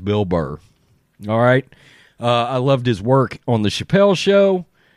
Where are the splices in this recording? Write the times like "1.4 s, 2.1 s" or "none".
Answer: none